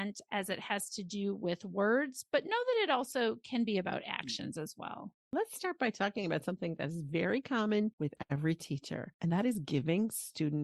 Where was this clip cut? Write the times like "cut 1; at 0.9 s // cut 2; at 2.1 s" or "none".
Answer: none